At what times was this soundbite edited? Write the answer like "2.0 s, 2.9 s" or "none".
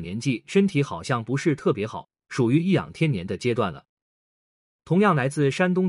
none